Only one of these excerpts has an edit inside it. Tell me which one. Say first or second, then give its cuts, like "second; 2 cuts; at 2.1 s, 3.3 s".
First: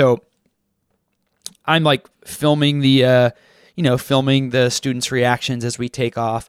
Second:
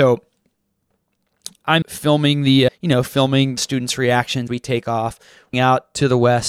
second; 5 cuts; at 1.8 s, 2.7 s, 3.6 s, 4.5 s, 5.5 s